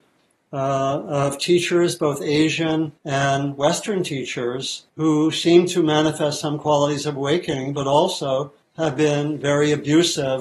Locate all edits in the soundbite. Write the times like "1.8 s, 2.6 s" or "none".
3.0 s, 4.9 s, 8.6 s